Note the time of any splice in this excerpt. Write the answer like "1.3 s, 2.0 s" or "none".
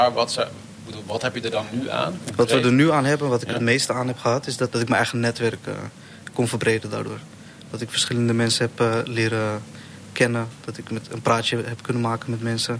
4.7 s